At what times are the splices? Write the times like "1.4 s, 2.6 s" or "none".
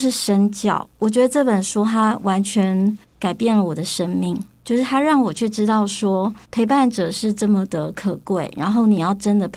3.0 s, 6.4 s

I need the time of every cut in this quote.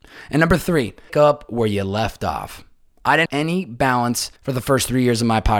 1.1 s, 3.3 s, 4.4 s

